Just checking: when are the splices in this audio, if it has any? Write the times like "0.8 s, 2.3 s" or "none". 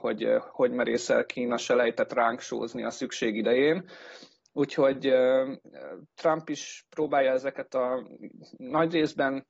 6.1 s